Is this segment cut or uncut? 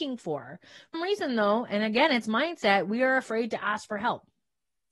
cut